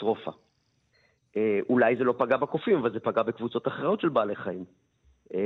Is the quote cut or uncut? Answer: uncut